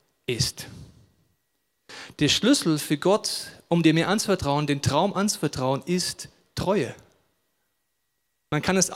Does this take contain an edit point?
no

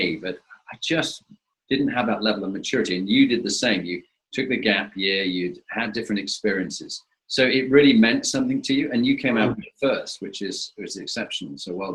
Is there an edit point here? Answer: no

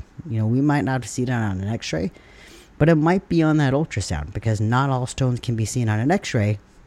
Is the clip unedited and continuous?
yes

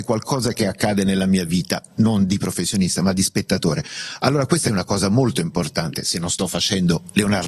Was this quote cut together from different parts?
no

